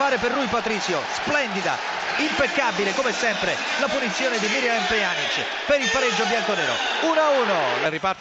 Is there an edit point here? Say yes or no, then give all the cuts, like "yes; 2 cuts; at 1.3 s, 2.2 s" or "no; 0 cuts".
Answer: no; 0 cuts